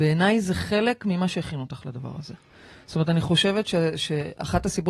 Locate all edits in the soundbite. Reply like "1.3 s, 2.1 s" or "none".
none